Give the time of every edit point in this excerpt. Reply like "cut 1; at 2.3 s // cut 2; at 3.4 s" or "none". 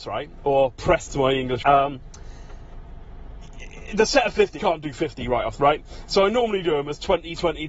cut 1; at 1.1 s // cut 2; at 1.6 s // cut 3; at 4.6 s // cut 4; at 5.6 s